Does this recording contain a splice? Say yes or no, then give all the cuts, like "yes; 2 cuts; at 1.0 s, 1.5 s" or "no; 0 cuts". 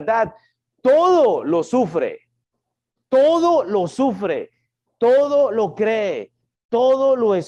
no; 0 cuts